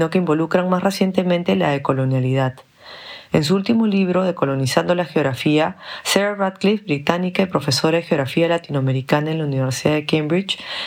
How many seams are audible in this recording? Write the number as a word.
zero